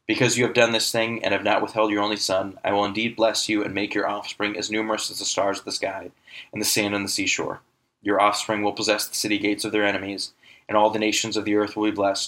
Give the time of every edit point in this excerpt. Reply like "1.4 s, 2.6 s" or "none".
none